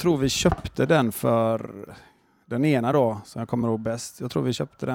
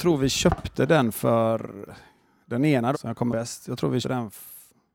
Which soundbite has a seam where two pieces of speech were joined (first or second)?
second